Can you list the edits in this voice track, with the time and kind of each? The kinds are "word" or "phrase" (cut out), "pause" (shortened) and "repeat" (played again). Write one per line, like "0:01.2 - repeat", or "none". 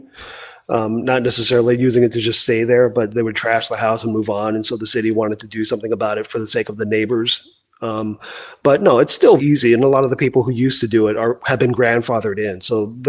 0:09.4 - word